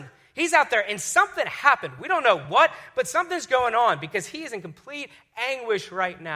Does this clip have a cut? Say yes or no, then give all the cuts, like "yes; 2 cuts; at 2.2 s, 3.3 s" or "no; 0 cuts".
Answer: no; 0 cuts